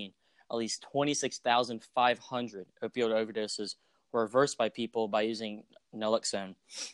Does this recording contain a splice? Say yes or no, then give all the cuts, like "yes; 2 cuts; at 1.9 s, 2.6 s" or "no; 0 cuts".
no; 0 cuts